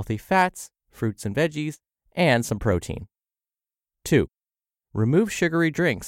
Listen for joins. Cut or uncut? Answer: uncut